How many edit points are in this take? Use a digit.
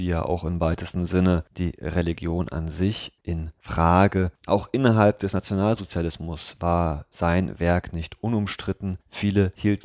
0